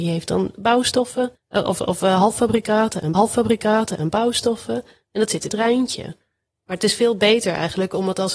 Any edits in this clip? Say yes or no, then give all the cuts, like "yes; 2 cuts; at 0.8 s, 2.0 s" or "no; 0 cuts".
yes; 3 cuts; at 1.4 s, 3.1 s, 5.5 s